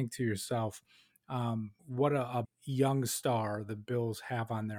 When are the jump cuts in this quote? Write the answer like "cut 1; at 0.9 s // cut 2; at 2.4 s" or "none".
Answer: cut 1; at 1.8 s // cut 2; at 2.4 s